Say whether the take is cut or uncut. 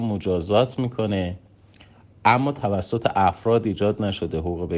uncut